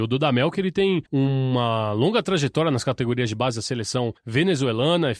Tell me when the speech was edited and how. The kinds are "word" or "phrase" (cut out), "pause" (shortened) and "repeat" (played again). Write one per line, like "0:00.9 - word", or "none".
0:01.1 - pause
0:04.2 - pause